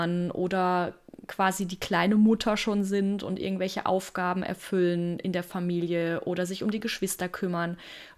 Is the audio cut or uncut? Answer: uncut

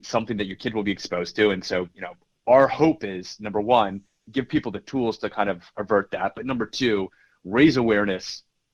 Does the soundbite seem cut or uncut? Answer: uncut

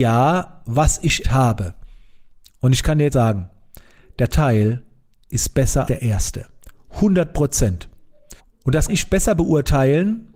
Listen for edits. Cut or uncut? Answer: cut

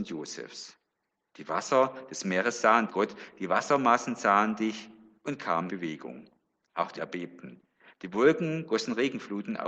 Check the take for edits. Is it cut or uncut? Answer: cut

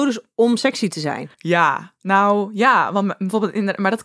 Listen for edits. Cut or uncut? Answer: cut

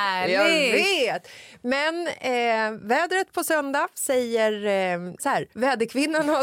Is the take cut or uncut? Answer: cut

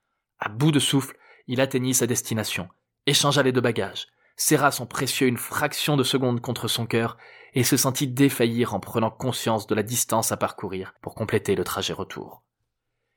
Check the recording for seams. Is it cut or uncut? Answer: uncut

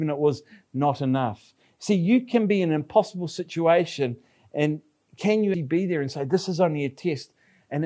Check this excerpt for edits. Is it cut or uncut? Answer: cut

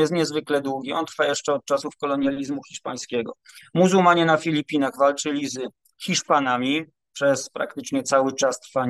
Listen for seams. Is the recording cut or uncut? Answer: uncut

